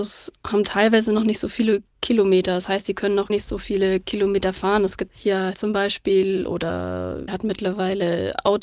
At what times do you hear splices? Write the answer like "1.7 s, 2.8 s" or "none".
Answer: 1.9 s, 3.3 s, 5.1 s, 5.5 s, 7.3 s